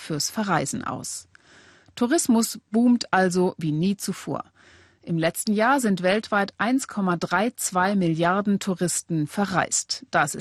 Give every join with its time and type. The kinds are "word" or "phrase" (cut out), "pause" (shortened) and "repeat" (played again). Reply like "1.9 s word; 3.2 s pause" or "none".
none